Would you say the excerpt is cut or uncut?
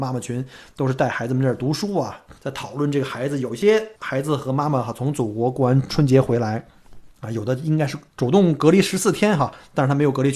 cut